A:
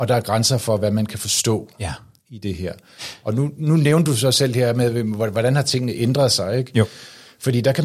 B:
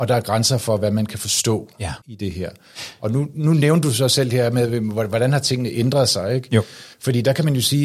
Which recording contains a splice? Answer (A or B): B